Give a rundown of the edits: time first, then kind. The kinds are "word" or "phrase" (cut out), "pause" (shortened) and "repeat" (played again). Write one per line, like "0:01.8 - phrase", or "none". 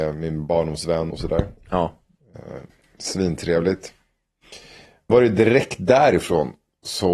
0:01.1 - phrase
0:02.7 - pause
0:05.1 - word